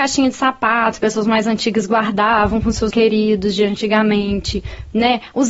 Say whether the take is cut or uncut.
cut